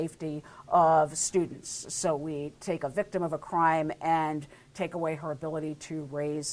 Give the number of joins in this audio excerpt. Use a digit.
0